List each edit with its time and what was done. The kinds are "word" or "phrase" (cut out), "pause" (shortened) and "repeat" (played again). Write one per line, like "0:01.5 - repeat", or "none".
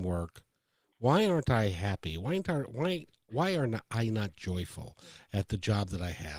none